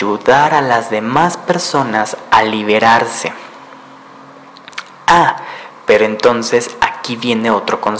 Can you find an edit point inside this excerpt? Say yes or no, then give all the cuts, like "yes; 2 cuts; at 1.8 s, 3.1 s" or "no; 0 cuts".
no; 0 cuts